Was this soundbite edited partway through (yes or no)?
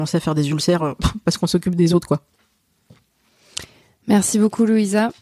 no